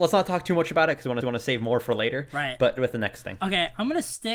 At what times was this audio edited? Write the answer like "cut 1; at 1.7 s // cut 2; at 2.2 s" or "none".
cut 1; at 1.2 s // cut 2; at 2.8 s